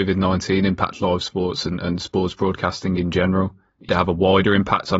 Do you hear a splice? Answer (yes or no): yes